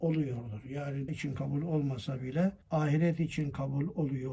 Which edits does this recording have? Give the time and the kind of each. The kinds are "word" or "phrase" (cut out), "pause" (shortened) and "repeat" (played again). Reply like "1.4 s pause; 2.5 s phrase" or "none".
1.1 s word; 2.6 s pause

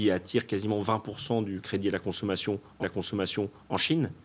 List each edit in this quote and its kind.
2.8 s repeat

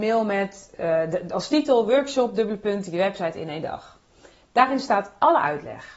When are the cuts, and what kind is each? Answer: none

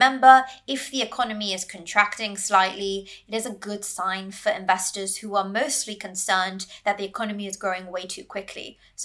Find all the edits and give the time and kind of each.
none

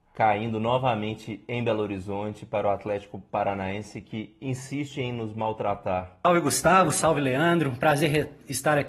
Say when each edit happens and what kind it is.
none

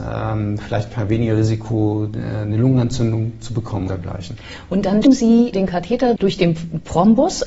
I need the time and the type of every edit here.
3.9 s word; 5.0 s word; 5.5 s word; 6.2 s word

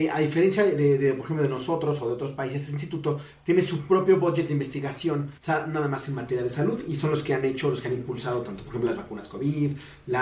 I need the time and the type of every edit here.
5.4 s pause

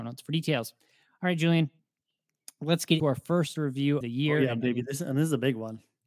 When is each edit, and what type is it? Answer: 3.0 s word; 3.6 s word; 4.0 s word

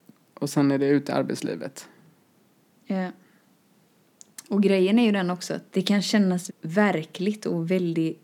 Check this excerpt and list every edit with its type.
5.7 s word; 6.5 s word

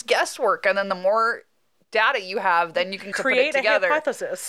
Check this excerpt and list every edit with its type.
3.1 s word

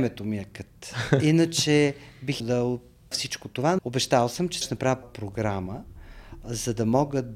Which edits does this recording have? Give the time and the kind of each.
2.4 s word; 3.1 s word; 3.8 s word; 4.6 s word; 5.0 s word

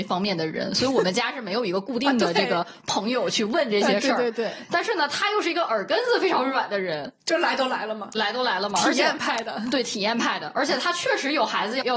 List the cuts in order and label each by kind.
7.2 s pause; 8.1 s word

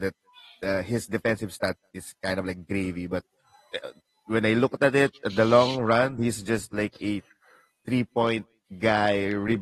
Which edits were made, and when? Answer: none

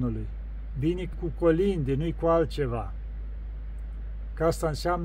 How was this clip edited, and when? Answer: 1.1 s word

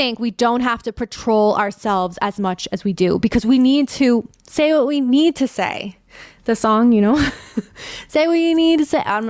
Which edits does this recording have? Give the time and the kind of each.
none

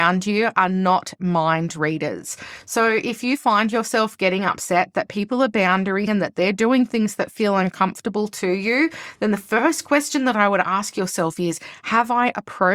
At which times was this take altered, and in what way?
6.1 s word

